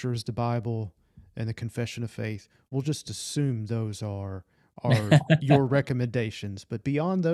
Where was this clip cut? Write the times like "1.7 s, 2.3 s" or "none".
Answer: none